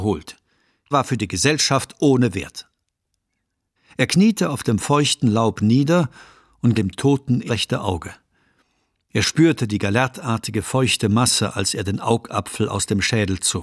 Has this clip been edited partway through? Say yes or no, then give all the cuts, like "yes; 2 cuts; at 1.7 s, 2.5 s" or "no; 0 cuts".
yes; 3 cuts; at 0.9 s, 6.7 s, 7.5 s